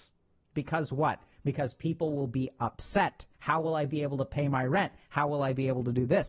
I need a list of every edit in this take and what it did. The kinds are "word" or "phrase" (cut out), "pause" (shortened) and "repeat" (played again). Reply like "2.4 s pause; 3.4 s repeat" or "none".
3.3 s pause